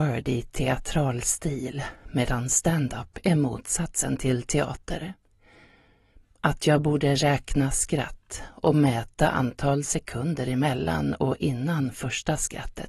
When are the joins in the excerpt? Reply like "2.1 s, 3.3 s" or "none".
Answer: none